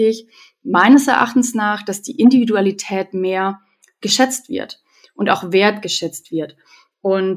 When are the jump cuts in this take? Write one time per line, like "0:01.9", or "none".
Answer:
none